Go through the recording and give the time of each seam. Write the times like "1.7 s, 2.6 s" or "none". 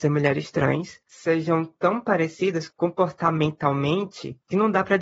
none

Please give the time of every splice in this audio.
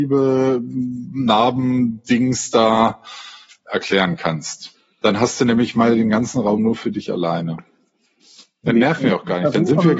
none

